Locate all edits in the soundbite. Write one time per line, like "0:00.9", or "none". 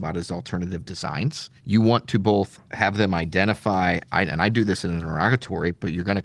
0:01.6
0:02.6